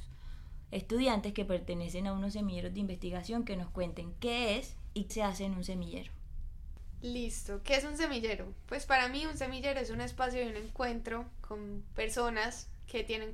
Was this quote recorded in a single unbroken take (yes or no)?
no